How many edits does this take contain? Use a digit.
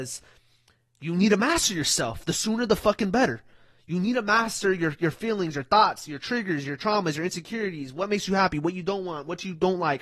0